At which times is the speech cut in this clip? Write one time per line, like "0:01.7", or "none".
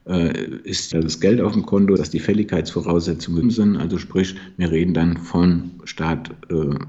0:00.9
0:02.0
0:03.4